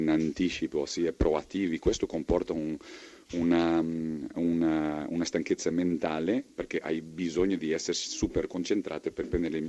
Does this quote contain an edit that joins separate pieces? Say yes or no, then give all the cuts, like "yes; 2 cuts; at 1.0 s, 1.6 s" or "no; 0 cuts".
no; 0 cuts